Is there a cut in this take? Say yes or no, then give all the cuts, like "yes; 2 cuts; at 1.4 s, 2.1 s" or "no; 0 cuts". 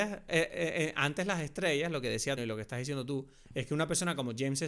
yes; 1 cut; at 2.4 s